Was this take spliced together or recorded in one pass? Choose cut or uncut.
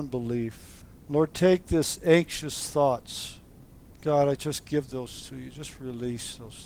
uncut